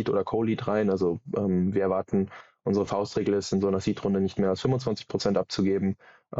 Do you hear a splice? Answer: no; 0 cuts

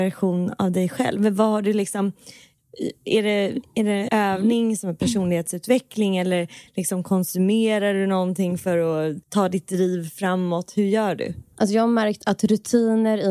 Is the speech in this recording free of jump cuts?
no; 2 cuts; at 4.1 s, 9.2 s

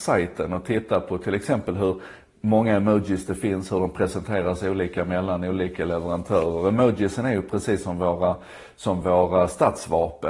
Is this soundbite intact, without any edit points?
yes; 0 cuts

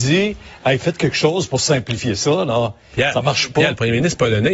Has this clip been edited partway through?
no; 0 cuts

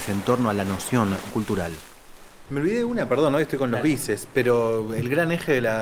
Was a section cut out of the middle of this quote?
yes; 1 cut; at 1.3 s

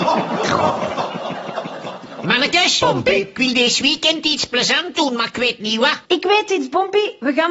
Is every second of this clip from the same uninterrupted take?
no; 1 cut; at 6.0 s

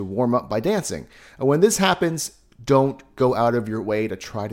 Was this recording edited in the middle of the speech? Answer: no; 0 cuts

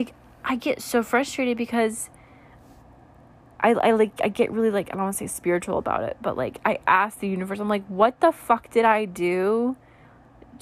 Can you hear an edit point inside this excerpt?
no; 0 cuts

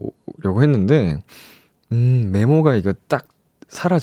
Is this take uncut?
yes; 0 cuts

